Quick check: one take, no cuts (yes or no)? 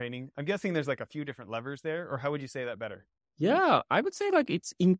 yes